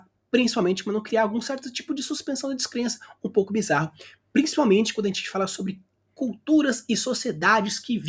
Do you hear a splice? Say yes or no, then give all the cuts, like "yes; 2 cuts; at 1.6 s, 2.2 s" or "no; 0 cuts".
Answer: no; 0 cuts